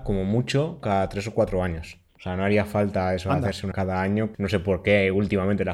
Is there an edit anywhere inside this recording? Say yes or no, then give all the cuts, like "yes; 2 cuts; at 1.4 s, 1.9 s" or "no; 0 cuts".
yes; 3 cuts; at 2.1 s, 3.7 s, 4.3 s